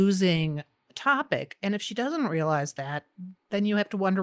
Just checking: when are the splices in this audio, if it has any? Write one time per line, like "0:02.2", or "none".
none